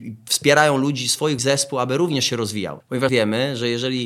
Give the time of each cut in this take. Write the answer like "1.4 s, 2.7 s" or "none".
1.4 s, 3.1 s